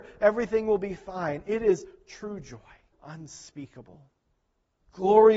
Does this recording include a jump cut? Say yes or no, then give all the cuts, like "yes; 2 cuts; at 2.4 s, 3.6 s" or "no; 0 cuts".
yes; 1 cut; at 2.9 s